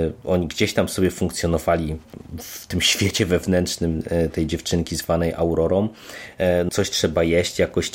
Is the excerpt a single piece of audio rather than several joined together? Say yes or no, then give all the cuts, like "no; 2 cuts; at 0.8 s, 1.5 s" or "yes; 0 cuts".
no; 1 cut; at 6.7 s